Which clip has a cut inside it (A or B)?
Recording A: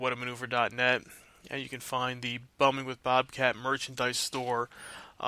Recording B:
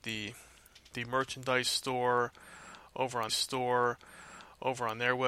B